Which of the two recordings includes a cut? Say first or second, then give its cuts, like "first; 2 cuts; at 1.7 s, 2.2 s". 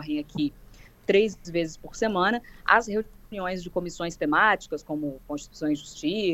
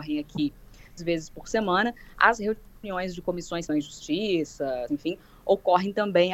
second; 3 cuts; at 0.9 s, 3.7 s, 4.9 s